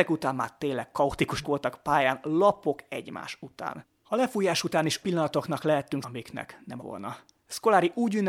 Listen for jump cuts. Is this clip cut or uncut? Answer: cut